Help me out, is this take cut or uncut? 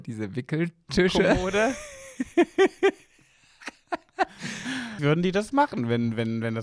cut